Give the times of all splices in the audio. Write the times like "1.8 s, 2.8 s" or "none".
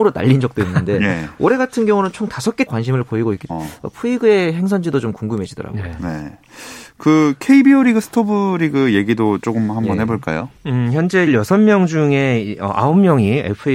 2.7 s, 3.5 s, 11.3 s

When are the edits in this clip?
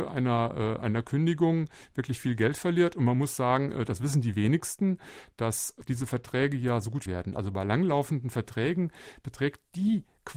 7.1 s

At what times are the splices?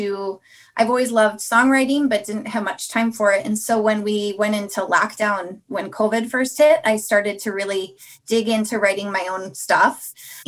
none

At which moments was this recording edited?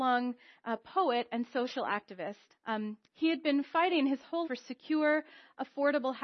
2.5 s, 4.4 s

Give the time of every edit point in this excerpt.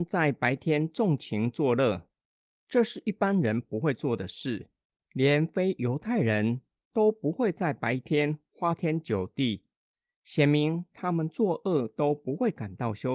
none

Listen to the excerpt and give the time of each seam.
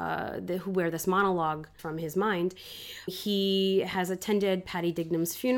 1.8 s, 3.1 s

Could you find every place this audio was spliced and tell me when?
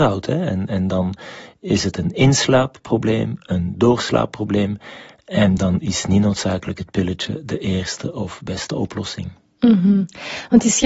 none

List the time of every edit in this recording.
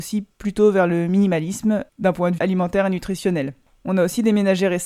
1.9 s, 2.4 s

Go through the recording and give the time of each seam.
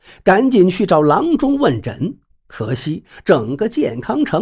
none

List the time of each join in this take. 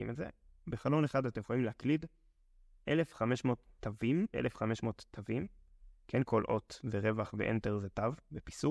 4.3 s

